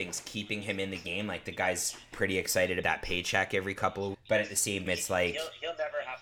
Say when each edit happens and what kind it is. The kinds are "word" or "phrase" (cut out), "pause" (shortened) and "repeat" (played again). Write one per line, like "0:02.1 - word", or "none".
0:02.1 - word
0:02.8 - word
0:04.1 - word
0:04.9 - word

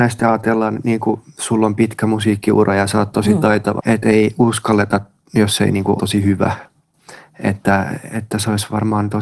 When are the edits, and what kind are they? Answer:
0:03.8 - word
0:06.0 - word

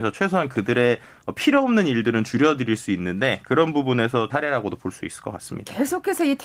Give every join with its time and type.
0:04.3 - phrase

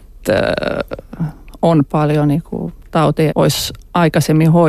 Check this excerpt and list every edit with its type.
0:01.9 - word
0:03.3 - word

